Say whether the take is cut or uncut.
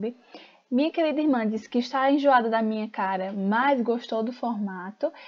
uncut